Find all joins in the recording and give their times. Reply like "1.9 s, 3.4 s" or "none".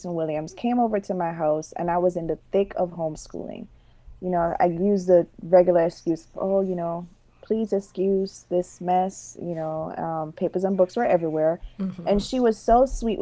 none